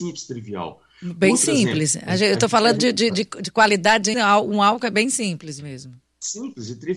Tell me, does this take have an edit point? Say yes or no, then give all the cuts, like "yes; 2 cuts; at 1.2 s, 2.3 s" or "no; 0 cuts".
yes; 2 cuts; at 3.1 s, 4.1 s